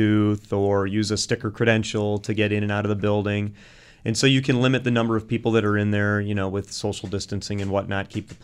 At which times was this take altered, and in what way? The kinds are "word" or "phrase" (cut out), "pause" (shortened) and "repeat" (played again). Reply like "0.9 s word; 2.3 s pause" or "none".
none

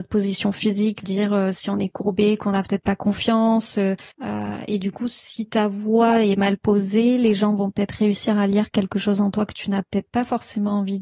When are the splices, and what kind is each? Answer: 1.0 s word; 4.1 s pause

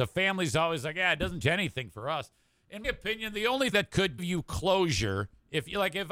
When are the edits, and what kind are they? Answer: 1.4 s word; 2.8 s word; 3.7 s word; 4.2 s word

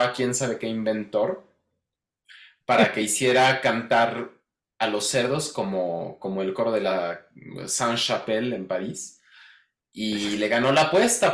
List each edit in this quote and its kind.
none

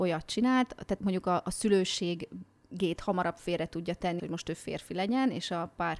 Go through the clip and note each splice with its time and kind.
1.0 s word; 4.2 s word

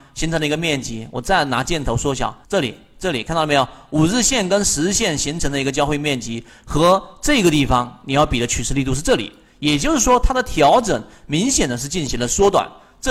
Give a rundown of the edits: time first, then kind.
2.4 s pause

